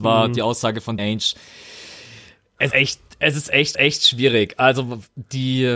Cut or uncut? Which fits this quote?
cut